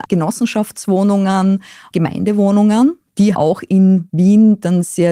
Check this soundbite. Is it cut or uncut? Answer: cut